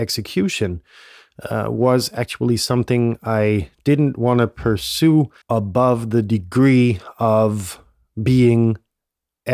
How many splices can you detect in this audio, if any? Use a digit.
1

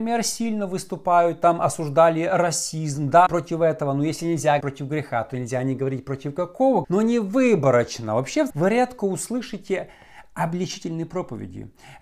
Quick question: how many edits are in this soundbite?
4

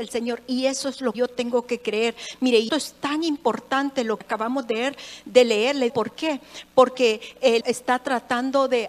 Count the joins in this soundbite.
5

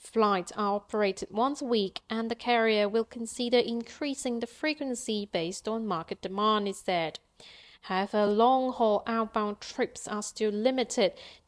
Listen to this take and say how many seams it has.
0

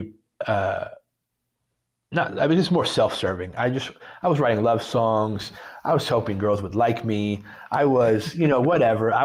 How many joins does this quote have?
0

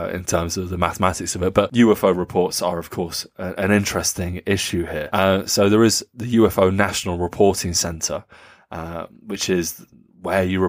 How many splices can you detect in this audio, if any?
0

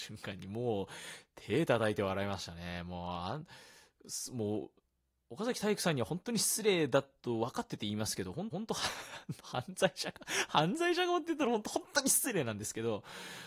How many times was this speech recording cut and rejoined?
1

